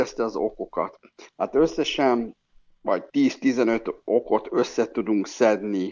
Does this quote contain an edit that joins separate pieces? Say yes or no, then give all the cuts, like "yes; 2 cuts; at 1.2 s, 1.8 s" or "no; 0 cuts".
yes; 1 cut; at 3.1 s